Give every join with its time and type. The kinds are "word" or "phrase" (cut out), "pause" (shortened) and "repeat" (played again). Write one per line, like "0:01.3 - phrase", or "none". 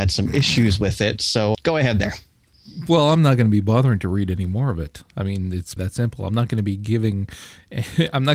0:01.5 - word
0:05.8 - word